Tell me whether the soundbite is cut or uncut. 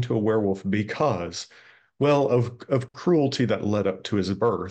uncut